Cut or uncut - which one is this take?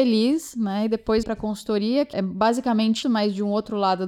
cut